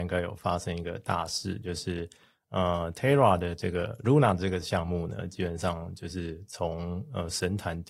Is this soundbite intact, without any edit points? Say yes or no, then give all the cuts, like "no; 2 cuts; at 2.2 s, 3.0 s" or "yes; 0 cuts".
yes; 0 cuts